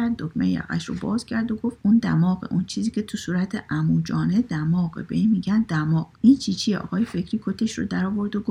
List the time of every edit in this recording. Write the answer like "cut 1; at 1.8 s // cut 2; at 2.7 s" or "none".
cut 1; at 1.8 s // cut 2; at 6.1 s

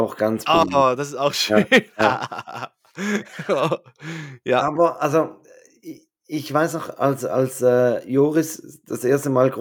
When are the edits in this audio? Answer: none

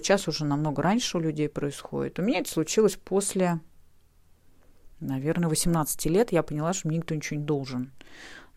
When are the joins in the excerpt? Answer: cut 1; at 4.9 s

